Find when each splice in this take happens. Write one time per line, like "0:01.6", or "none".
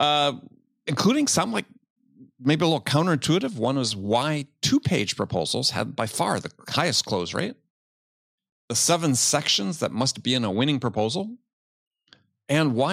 none